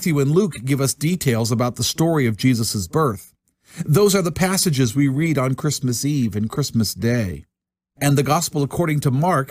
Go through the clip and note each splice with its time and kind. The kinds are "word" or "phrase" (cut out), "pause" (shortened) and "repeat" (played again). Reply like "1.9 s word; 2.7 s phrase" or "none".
none